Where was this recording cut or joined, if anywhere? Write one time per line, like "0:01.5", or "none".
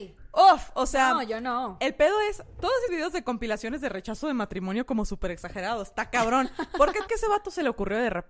0:02.9
0:07.1